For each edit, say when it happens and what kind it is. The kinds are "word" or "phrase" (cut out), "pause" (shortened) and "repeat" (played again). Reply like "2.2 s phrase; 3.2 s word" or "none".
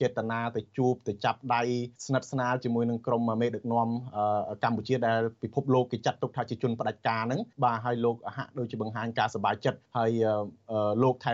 2.0 s pause; 7.5 s pause; 9.8 s pause